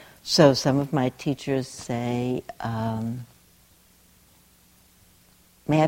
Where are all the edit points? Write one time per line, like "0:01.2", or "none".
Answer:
none